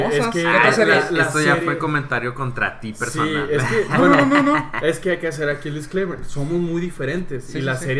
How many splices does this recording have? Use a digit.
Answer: 0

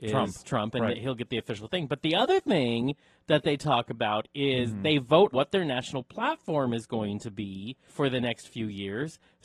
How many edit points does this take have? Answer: 2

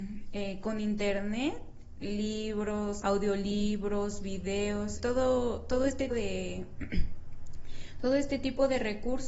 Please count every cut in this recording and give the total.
4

